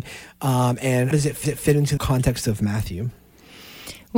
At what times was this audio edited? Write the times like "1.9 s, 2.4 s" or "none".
1.1 s, 1.4 s, 2.0 s